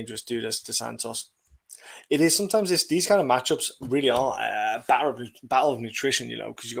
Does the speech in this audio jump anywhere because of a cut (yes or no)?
no